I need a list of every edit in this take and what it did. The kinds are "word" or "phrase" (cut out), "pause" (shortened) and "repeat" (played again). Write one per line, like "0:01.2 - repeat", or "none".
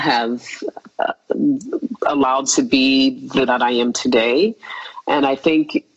0:02.5 - word
0:03.5 - word